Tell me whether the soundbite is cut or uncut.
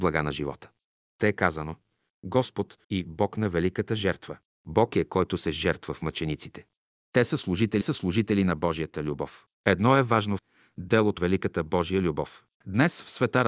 cut